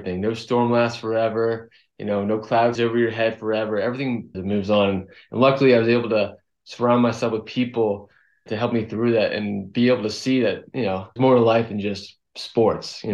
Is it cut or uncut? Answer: cut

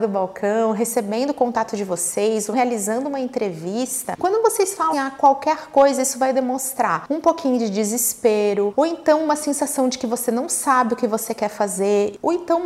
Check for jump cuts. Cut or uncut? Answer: cut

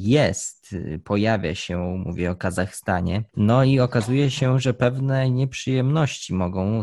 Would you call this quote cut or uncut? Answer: cut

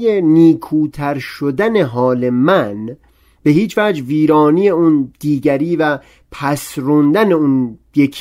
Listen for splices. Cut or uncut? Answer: uncut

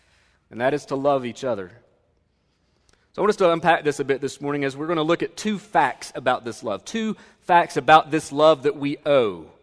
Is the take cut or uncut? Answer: uncut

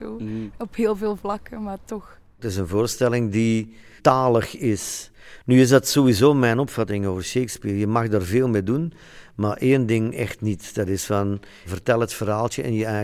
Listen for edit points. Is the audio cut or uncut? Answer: uncut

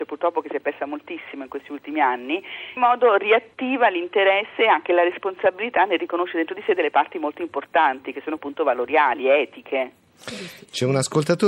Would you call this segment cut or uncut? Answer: cut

